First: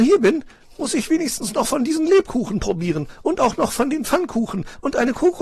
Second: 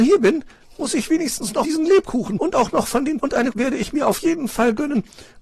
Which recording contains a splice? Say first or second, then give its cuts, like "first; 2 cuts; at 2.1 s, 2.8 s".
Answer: second; 4 cuts; at 1.6 s, 2.4 s, 3.2 s, 3.5 s